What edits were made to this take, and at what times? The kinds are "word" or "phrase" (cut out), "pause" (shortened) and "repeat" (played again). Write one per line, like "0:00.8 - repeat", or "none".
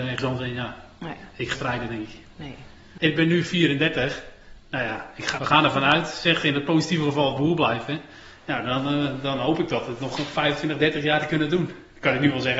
0:01.5 - phrase
0:05.4 - word
0:07.4 - phrase
0:10.2 - word